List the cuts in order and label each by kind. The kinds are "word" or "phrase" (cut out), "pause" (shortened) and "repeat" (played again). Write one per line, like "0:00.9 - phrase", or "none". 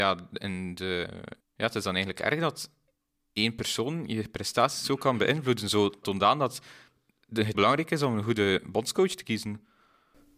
0:01.4 - pause
0:06.0 - word
0:07.5 - word